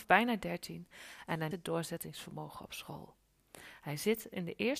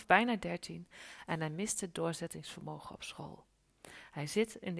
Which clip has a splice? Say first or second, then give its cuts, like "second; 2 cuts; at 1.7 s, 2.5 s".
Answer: first; 1 cut; at 1.5 s